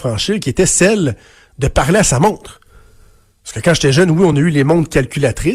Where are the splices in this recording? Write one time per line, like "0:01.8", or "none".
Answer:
none